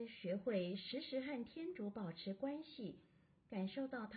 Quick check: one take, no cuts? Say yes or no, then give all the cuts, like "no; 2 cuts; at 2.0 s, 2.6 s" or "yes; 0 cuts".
yes; 0 cuts